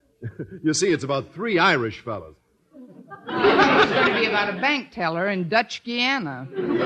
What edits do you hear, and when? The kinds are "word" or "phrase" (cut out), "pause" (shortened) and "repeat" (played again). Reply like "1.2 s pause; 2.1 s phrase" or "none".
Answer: none